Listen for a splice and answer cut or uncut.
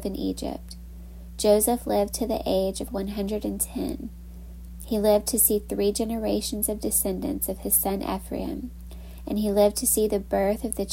uncut